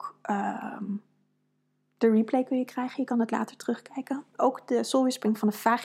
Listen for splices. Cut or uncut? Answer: uncut